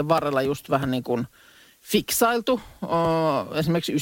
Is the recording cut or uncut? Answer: uncut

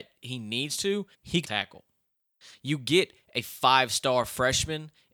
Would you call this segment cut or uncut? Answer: cut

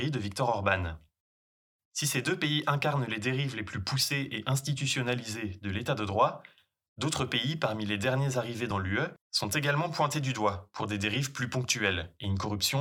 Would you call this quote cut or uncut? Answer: uncut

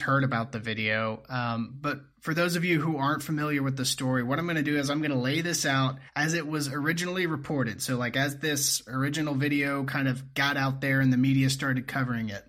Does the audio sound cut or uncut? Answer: cut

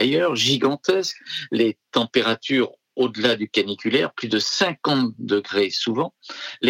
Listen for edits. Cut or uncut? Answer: uncut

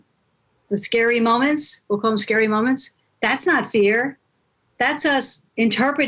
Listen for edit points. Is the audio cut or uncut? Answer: uncut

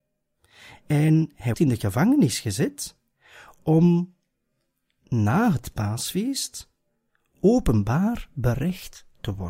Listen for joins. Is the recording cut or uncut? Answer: cut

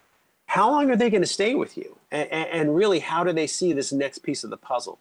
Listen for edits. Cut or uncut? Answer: uncut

